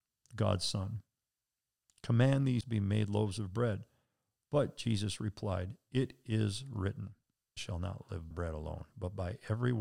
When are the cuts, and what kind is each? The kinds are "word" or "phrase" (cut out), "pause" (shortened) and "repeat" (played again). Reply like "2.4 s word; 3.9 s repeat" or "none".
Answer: 2.6 s word; 7.6 s word; 8.3 s word